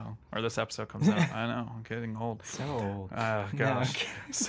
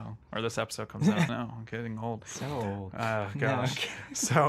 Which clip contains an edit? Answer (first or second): second